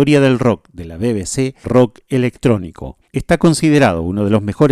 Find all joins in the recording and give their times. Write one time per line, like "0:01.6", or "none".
0:01.6
0:03.1